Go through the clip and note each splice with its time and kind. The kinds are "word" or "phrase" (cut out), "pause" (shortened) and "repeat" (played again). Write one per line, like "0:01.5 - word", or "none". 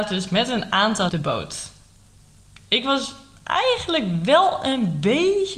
0:01.1 - phrase